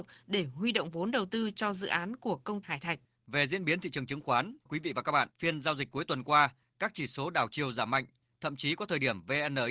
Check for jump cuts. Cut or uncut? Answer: cut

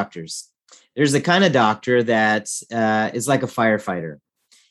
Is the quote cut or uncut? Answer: uncut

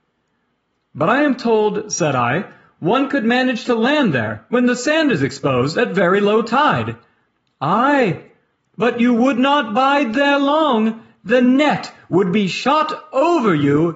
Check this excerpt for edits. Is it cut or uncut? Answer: uncut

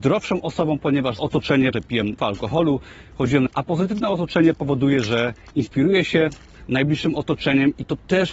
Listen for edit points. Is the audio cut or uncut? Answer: cut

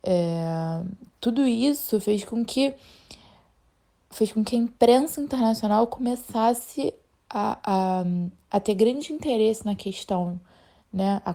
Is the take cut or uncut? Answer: uncut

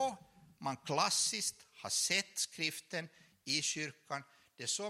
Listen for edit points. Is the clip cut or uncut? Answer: uncut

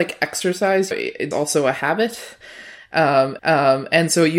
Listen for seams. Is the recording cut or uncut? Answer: cut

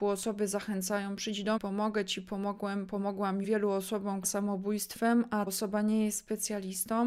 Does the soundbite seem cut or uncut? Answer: cut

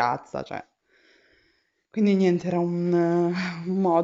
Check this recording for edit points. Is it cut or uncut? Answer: uncut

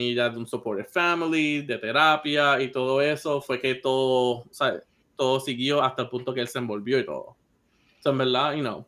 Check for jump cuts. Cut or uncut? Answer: uncut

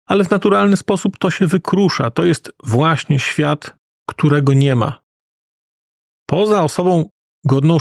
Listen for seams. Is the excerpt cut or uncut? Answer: uncut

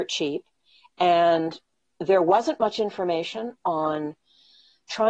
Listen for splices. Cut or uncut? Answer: uncut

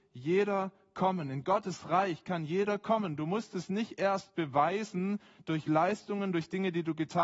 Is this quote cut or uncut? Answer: uncut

